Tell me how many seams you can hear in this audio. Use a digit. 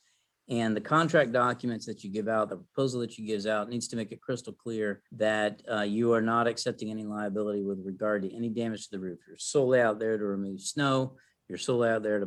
1